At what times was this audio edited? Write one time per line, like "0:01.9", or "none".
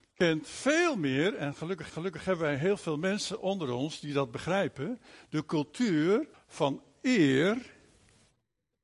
0:01.9
0:06.3

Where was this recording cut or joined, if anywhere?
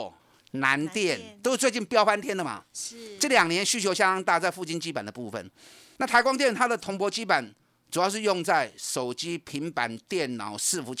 none

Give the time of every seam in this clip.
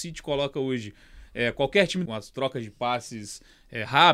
0:02.1

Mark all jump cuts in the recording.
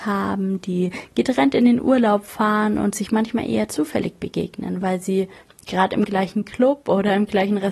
none

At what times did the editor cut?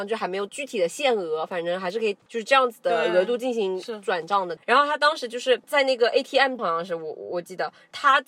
0:04.6
0:06.6

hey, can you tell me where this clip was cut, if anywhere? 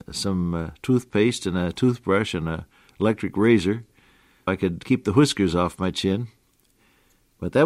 0:04.5

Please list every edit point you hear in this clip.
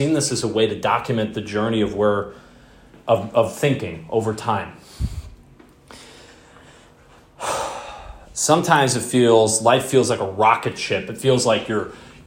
none

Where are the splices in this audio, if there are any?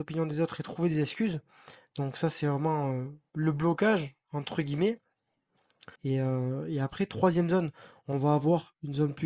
0:05.9

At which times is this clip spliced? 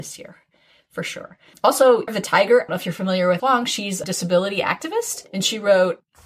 0:02.1
0:02.7
0:03.4
0:04.0

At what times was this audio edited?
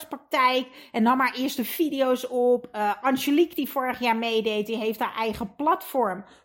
none

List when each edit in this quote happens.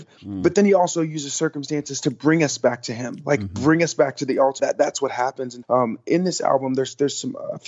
0:04.6
0:05.6

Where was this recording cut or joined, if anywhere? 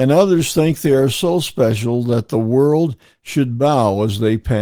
none

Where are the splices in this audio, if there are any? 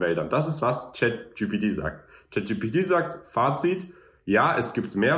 none

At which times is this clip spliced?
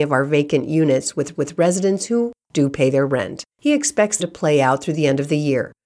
0:01.3
0:03.5
0:04.2

